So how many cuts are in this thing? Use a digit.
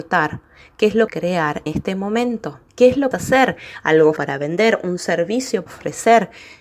6